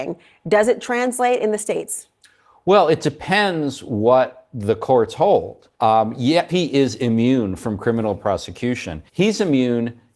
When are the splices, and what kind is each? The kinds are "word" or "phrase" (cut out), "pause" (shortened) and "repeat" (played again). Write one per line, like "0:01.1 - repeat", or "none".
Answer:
0:05.7 - pause
0:06.5 - word
0:09.1 - pause